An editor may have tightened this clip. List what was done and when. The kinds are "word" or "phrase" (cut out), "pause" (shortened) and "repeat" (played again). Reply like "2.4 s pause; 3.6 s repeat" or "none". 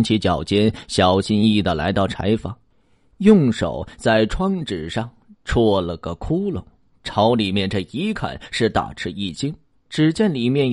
none